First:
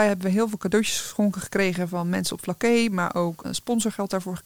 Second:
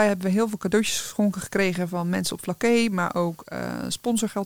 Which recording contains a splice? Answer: first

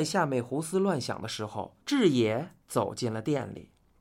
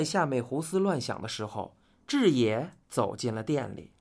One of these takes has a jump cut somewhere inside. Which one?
first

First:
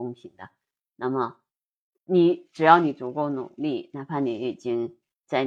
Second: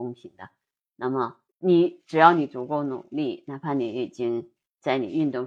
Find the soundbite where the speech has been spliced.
second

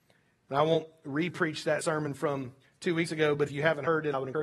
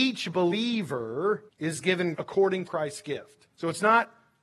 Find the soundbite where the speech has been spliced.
second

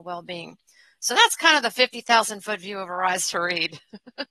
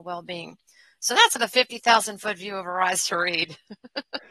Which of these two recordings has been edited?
second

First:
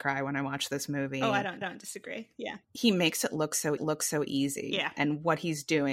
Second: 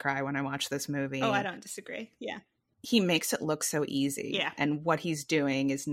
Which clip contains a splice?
first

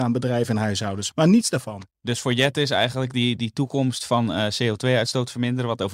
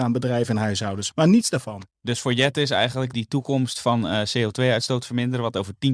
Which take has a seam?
second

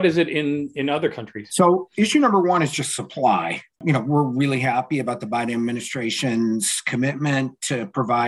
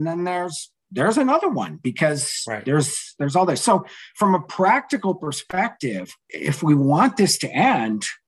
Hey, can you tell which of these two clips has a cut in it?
first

